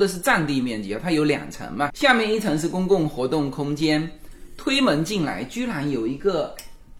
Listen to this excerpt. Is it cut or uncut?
cut